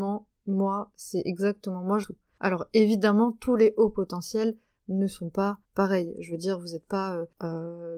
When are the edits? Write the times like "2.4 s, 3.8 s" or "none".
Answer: 2.0 s, 5.6 s